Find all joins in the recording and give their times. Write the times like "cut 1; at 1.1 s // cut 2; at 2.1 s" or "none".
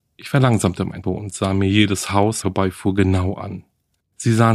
cut 1; at 1.0 s // cut 2; at 2.4 s